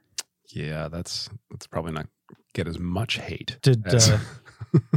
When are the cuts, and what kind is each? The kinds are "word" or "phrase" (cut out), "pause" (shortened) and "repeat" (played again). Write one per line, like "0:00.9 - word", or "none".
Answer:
0:01.4 - pause
0:02.0 - word
0:03.6 - pause